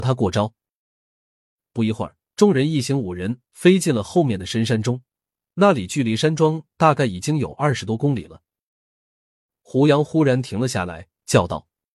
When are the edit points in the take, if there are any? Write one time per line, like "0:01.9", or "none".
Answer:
0:02.3